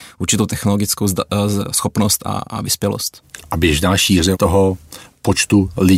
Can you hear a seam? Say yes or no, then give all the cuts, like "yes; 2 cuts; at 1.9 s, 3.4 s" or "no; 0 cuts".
no; 0 cuts